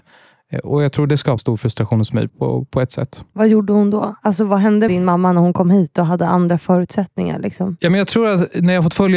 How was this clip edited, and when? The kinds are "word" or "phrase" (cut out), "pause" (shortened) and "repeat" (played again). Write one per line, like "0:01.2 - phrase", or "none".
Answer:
0:01.1 - word
0:01.4 - word
0:02.3 - word
0:04.9 - word